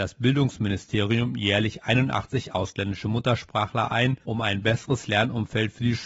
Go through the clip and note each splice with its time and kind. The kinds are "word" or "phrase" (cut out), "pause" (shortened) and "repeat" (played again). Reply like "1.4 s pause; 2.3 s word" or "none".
4.2 s pause